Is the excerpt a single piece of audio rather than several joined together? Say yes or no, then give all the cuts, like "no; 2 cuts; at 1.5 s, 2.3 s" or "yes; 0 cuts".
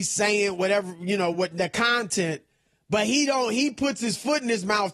yes; 0 cuts